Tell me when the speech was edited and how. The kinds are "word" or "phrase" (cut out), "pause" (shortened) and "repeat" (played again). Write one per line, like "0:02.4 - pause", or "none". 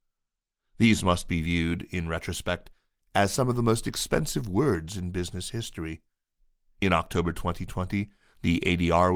none